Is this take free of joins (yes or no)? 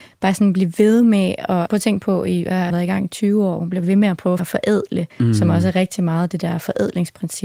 no